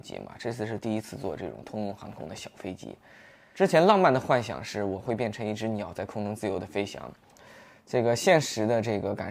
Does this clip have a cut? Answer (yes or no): no